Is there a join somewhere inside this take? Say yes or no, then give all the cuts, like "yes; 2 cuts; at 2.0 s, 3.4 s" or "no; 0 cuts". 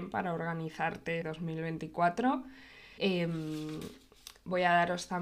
yes; 2 cuts; at 1.2 s, 3.0 s